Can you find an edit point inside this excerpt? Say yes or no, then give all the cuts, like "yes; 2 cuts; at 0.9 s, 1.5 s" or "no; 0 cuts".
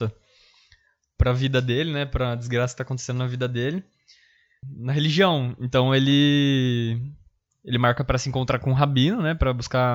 no; 0 cuts